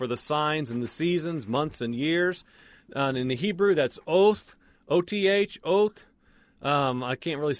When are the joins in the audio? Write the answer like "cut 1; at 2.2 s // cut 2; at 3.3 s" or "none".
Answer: none